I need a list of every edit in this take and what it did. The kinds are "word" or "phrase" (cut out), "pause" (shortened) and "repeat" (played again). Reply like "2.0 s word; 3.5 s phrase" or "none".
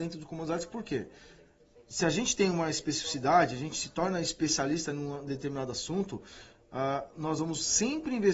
none